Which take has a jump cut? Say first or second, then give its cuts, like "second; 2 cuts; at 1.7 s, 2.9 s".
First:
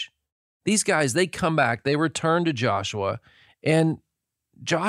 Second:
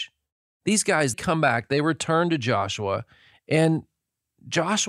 second; 1 cut; at 1.1 s